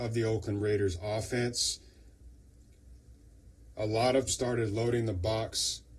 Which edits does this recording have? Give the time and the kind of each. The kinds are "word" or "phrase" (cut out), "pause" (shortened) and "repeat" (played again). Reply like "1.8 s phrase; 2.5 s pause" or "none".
4.3 s word